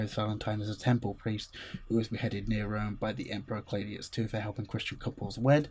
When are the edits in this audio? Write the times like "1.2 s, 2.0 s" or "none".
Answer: none

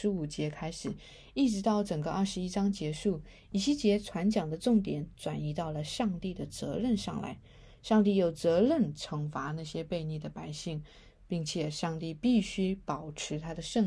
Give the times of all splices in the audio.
none

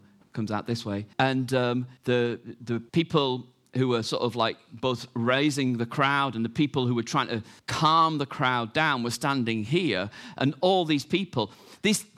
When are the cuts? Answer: 1.1 s, 2.0 s, 2.9 s, 7.6 s

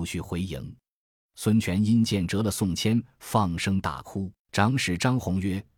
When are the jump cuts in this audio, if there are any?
4.4 s

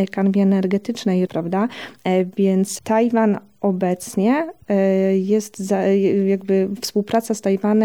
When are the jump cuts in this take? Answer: 1.3 s

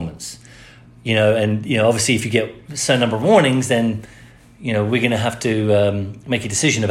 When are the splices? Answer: none

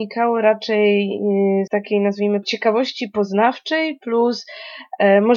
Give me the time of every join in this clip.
1.7 s, 2.4 s

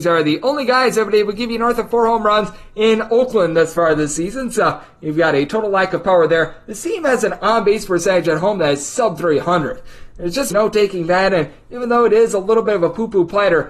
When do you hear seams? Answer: 10.5 s

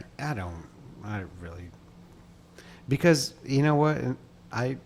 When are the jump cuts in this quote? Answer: none

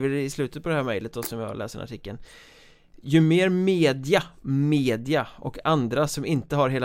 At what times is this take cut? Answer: none

